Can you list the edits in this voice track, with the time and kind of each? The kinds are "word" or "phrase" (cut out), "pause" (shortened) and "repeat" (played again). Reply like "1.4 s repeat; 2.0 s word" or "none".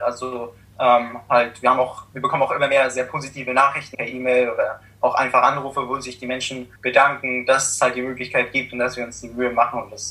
3.9 s word; 6.8 s pause

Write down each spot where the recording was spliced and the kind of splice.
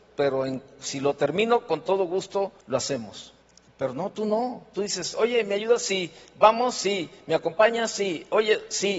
2.6 s pause; 3.4 s pause

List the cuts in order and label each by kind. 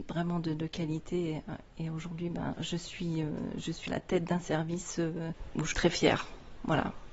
2.5 s word; 3.9 s word; 5.7 s word

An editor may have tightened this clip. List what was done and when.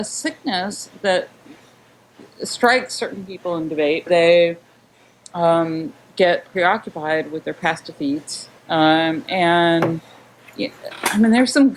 4.1 s word; 8.6 s pause

